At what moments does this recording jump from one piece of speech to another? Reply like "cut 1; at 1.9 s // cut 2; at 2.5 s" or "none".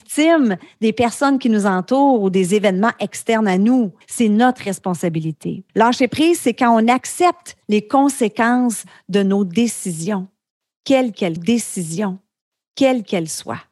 cut 1; at 4.0 s // cut 2; at 5.7 s // cut 3; at 7.6 s // cut 4; at 11.4 s